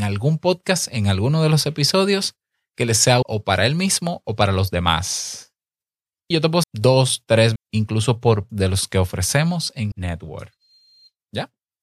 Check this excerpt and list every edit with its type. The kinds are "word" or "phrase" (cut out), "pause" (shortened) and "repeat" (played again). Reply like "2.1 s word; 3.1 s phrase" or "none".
3.2 s word; 6.3 s word; 6.6 s word; 7.6 s word; 8.5 s word; 9.9 s word